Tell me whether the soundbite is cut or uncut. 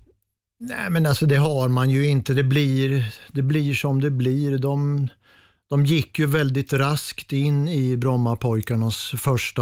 uncut